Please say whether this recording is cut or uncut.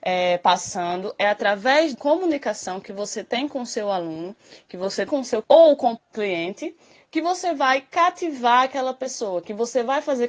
cut